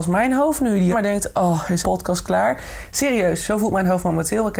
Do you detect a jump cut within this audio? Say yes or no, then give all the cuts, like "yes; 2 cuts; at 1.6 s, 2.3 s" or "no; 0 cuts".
yes; 2 cuts; at 0.9 s, 1.8 s